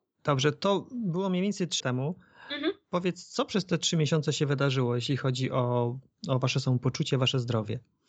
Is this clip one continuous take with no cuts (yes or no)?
no